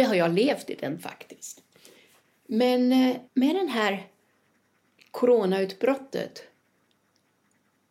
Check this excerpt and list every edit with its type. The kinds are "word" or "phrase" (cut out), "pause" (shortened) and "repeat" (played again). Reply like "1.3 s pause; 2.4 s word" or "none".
1.0 s word; 3.3 s pause